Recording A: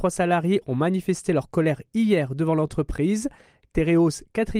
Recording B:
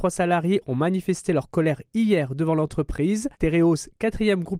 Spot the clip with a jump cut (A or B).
B